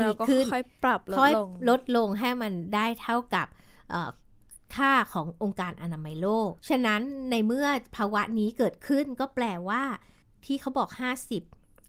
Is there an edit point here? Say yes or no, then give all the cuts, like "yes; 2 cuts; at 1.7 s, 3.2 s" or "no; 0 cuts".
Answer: yes; 2 cuts; at 6.6 s, 10.2 s